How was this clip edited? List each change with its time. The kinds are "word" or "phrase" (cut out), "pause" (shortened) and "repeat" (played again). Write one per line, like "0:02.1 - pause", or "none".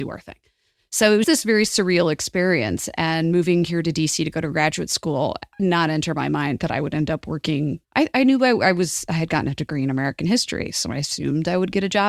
0:01.2 - word
0:05.6 - phrase
0:07.8 - pause